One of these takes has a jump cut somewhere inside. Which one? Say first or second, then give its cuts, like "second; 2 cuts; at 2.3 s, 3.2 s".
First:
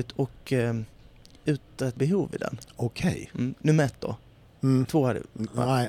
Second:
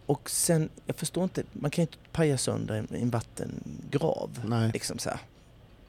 first; 1 cut; at 2.0 s